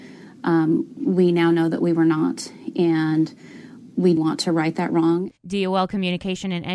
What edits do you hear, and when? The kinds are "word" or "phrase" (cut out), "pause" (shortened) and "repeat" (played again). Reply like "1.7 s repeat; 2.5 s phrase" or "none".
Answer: 4.2 s word; 5.4 s pause